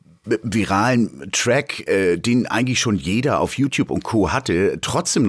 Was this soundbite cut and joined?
no; 0 cuts

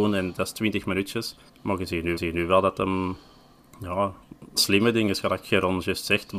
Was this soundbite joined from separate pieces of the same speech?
yes; 3 cuts; at 1.5 s, 2.2 s, 4.6 s

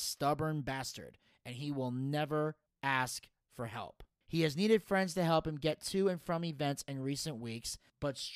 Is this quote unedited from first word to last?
yes; 0 cuts

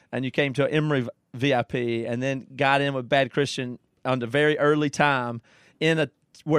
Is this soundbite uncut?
yes; 0 cuts

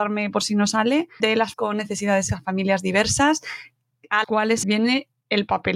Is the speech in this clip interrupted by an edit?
yes; 5 cuts; at 1.2 s, 1.5 s, 2.3 s, 4.2 s, 4.6 s

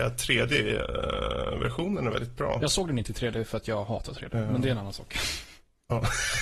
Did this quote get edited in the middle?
no; 0 cuts

